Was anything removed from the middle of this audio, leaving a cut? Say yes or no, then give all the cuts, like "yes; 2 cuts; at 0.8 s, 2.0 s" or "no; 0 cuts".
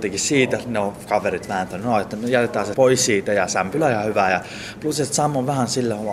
yes; 1 cut; at 2.7 s